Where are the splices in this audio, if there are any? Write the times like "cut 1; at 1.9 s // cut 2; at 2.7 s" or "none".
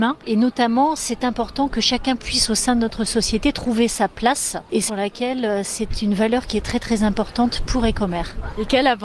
cut 1; at 4.9 s